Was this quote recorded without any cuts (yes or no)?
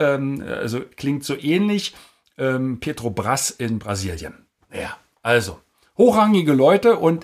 yes